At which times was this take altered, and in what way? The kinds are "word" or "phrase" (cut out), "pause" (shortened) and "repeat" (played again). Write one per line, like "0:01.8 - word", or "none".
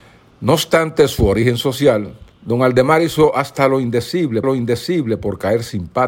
0:02.3 - pause
0:04.4 - repeat